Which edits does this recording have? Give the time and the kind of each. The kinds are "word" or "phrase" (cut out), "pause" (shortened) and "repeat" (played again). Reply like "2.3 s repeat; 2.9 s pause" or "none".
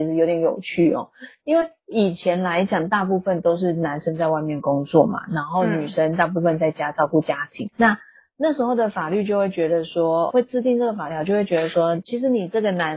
7.7 s word; 10.3 s word